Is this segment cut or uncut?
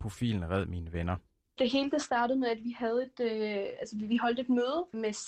uncut